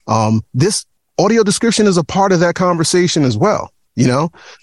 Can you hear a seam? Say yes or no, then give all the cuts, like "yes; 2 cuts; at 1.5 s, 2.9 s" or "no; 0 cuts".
no; 0 cuts